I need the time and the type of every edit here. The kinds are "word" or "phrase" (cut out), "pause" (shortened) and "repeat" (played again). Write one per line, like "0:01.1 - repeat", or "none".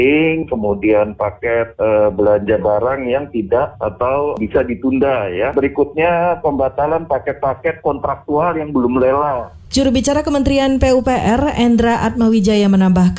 none